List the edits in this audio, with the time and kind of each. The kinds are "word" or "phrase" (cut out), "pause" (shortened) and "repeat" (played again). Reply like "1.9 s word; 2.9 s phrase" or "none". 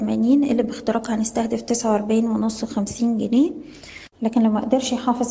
4.1 s pause